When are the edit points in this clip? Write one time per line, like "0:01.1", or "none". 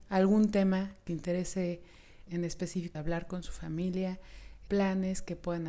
0:01.1
0:02.3
0:02.9
0:04.7

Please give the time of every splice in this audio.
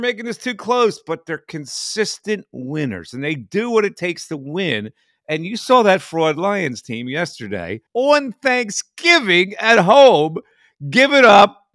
0:07.9

